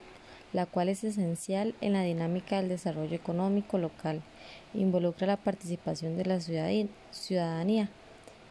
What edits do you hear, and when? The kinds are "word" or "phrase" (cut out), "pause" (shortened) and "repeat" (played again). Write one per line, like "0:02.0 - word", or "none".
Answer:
none